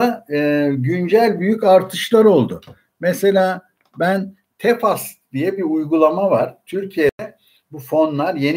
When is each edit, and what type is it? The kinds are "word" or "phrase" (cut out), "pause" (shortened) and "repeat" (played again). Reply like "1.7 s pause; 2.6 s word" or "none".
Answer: none